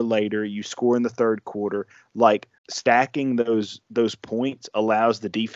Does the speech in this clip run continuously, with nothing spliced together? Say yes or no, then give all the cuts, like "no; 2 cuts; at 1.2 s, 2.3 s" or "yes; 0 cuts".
no; 1 cut; at 2.6 s